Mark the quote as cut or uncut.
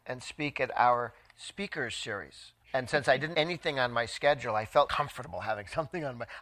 cut